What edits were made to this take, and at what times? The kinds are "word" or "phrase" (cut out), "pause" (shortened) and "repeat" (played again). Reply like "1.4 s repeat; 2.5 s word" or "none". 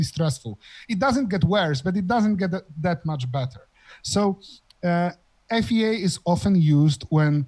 none